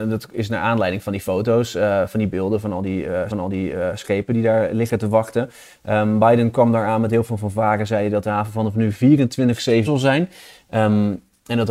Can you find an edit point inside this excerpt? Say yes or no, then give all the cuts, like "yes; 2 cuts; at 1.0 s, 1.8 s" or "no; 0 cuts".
yes; 2 cuts; at 3.3 s, 9.8 s